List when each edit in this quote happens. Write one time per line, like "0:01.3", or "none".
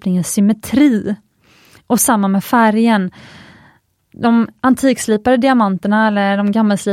none

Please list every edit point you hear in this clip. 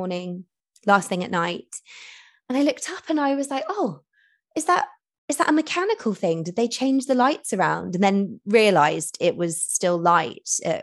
none

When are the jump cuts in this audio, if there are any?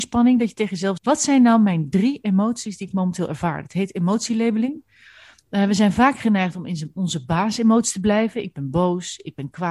0:01.0

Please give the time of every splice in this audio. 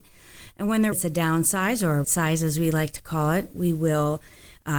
0:00.9
0:02.0

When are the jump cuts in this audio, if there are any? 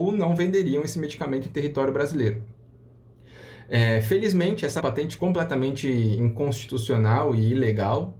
0:04.8

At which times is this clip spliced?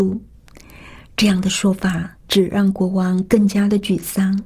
0:02.2

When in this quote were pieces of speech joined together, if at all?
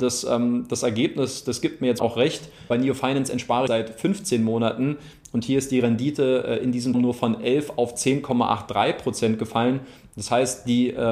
0:02.0
0:02.7
0:03.7
0:06.9

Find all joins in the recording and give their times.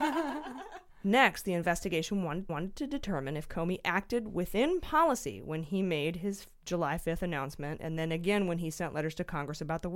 0:02.5

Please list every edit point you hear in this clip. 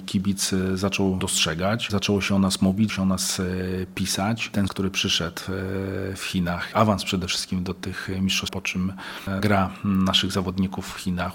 0:01.2
0:02.9
0:04.7
0:06.7
0:08.5
0:09.4

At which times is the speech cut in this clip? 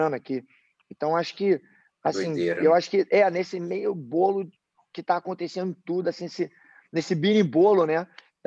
none

